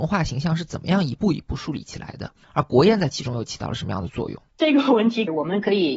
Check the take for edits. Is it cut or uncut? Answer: cut